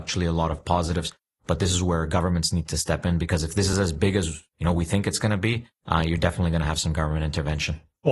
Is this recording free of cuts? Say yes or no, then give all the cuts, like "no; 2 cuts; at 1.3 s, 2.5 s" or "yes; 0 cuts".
yes; 0 cuts